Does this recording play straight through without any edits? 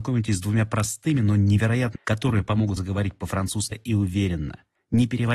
no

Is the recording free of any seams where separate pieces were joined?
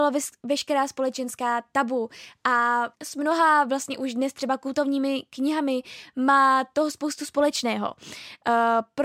no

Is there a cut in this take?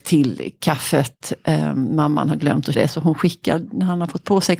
yes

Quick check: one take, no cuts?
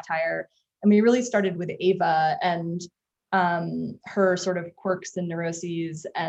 yes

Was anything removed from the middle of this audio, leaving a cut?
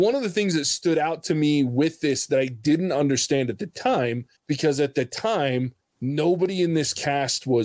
yes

